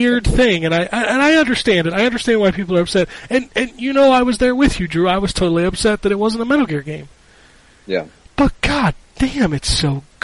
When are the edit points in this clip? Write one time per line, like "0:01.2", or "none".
none